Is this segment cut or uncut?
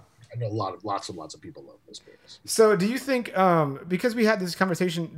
uncut